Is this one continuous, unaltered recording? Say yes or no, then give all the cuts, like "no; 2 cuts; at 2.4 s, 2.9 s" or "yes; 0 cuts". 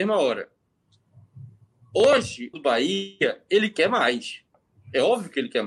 no; 1 cut; at 2.5 s